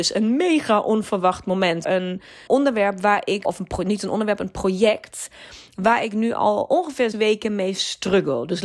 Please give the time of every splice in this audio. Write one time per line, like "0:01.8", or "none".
0:01.8
0:02.5
0:03.4
0:07.1